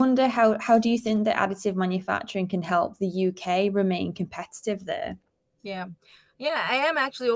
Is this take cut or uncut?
uncut